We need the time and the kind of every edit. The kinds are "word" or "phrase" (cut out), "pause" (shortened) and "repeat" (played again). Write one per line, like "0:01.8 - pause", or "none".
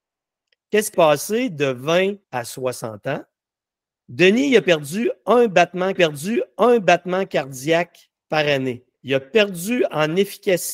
0:00.9 - word
0:02.2 - pause
0:03.6 - pause
0:06.0 - repeat
0:08.9 - pause

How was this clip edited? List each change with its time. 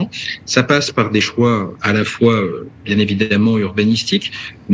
0:01.7 - word

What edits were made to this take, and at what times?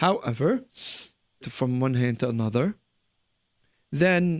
0:01.4 - phrase

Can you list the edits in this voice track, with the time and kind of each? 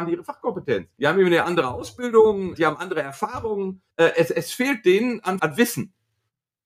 0:00.9 - pause
0:02.5 - word
0:03.9 - pause
0:05.4 - word

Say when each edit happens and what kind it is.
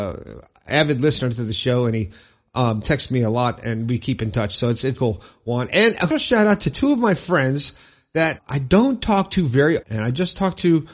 0:05.0 - word
0:06.1 - word
0:08.4 - word
0:09.8 - word

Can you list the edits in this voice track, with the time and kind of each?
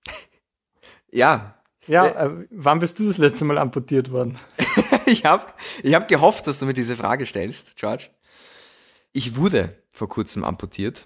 none

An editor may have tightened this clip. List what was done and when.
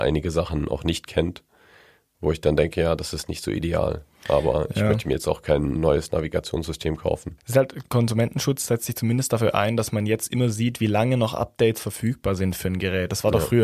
none

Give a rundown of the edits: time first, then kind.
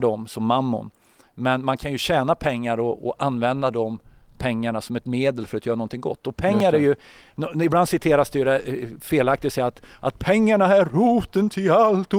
none

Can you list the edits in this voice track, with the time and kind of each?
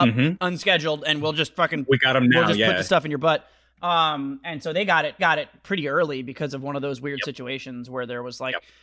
0:05.2 - repeat

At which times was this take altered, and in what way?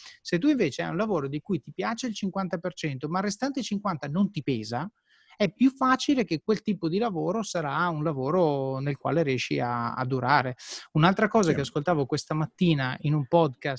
none

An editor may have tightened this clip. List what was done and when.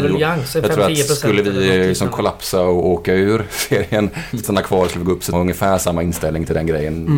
0:04.4 - word
0:05.3 - phrase

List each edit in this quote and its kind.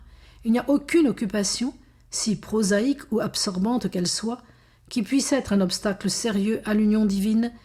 none

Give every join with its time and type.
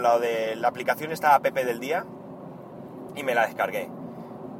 none

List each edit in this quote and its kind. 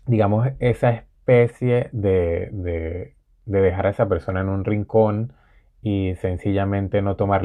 none

